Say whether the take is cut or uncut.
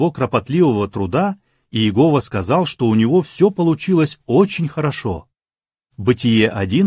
uncut